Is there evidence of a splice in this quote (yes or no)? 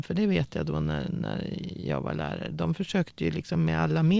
no